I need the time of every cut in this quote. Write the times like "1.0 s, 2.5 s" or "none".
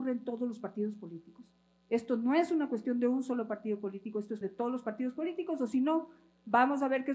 4.4 s